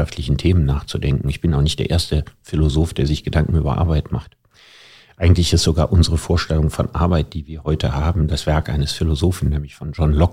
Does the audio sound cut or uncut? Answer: uncut